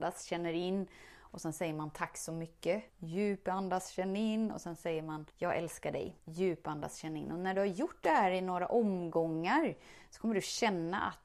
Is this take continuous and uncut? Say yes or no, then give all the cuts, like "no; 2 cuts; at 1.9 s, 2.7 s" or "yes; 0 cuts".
no; 3 cuts; at 2.9 s, 5.3 s, 6.2 s